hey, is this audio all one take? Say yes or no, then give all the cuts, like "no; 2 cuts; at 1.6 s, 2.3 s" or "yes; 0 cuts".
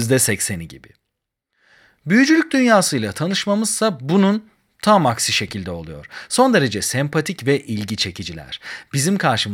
yes; 0 cuts